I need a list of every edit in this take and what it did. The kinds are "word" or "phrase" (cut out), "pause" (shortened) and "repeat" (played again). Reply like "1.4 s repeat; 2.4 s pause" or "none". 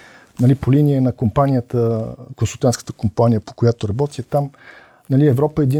3.4 s word